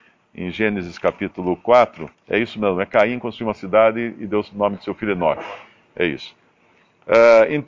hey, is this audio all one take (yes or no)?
no